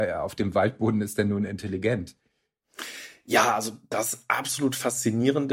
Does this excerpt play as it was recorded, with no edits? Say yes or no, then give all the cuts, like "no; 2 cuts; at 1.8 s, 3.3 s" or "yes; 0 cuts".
yes; 0 cuts